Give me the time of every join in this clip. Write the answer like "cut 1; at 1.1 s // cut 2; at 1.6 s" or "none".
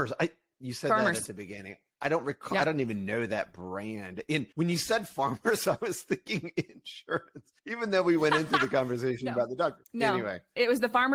cut 1; at 4.5 s // cut 2; at 7.6 s // cut 3; at 9.8 s